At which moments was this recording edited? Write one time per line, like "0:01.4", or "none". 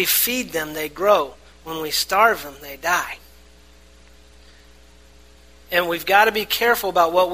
none